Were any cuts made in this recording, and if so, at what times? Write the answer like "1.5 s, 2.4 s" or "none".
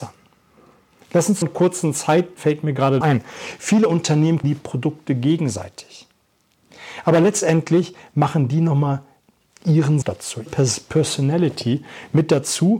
1.4 s, 2.4 s, 3.0 s, 4.4 s, 10.0 s, 10.5 s

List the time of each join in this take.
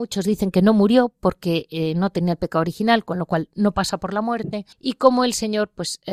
4.7 s

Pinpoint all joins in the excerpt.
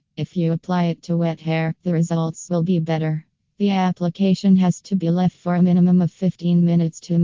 none

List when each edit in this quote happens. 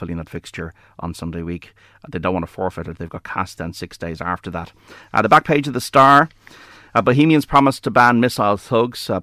none

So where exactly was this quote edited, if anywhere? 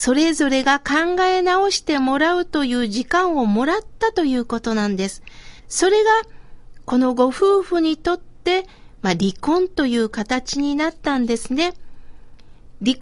5.6 s

